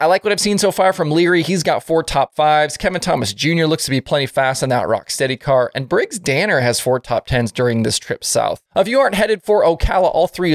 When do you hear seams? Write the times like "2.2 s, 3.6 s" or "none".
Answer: 8.7 s